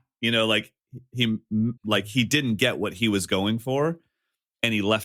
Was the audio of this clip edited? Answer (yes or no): yes